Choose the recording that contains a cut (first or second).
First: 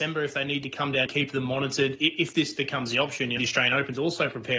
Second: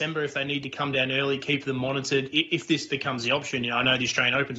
first